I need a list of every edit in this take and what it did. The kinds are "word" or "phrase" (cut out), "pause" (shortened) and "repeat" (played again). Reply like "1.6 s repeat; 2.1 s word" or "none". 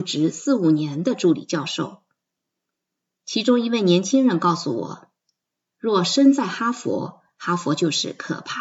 none